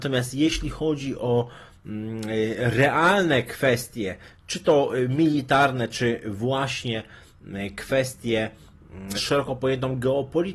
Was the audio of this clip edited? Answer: yes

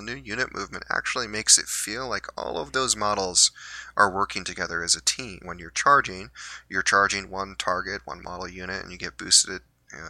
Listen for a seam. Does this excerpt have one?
yes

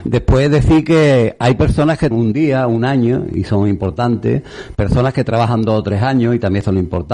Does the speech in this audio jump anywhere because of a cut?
yes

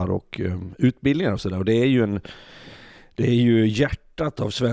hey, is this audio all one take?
yes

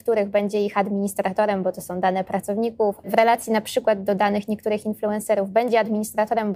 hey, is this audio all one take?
yes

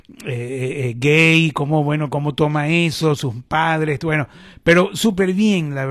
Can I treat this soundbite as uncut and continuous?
yes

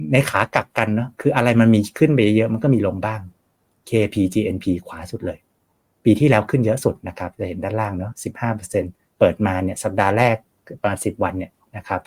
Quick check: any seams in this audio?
no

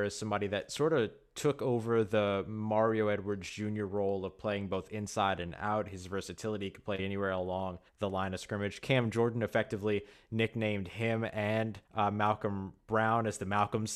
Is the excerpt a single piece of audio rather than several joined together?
no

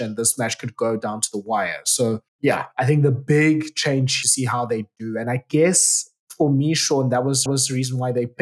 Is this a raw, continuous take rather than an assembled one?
no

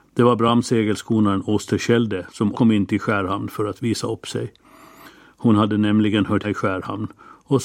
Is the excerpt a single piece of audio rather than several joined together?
no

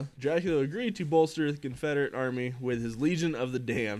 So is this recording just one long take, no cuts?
yes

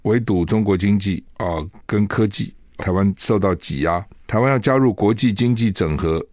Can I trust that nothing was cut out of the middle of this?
no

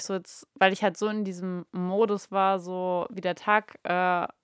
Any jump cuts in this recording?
no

